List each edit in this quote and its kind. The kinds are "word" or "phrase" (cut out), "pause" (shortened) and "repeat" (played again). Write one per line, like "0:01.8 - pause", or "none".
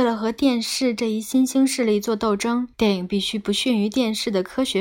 0:02.7 - pause

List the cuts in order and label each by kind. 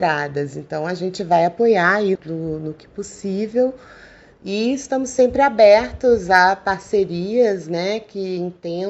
0:02.1 - word

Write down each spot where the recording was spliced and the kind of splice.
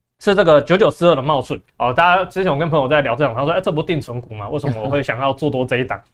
0:01.7 - pause

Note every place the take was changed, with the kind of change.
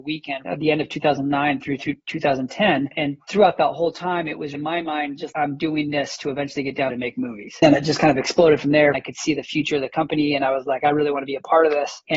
0:04.5 - word
0:05.3 - word
0:06.9 - phrase

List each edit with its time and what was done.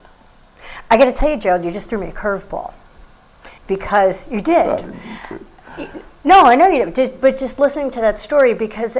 0:03.6 - pause

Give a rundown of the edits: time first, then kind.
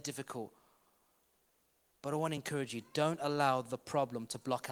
none

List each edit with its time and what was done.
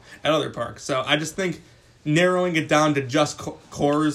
none

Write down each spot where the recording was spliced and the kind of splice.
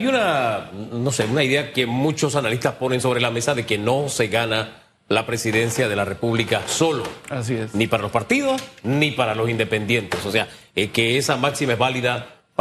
none

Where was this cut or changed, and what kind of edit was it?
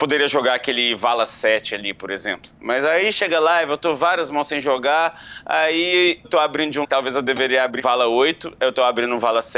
0:06.2 - word
0:06.8 - word
0:07.8 - word

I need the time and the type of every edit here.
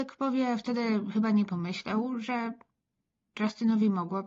none

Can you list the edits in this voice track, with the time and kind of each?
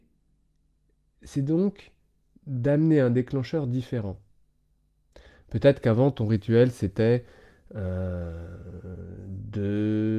none

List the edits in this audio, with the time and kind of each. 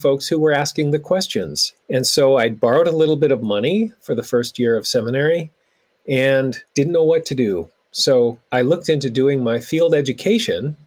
0:01.8 - pause
0:06.7 - pause
0:08.4 - pause

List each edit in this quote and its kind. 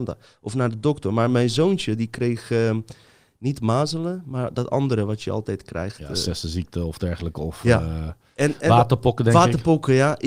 none

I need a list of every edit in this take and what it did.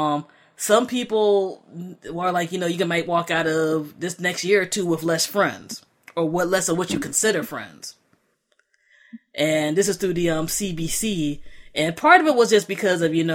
none

